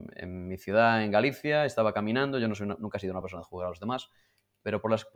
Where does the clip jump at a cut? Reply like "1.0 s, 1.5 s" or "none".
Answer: none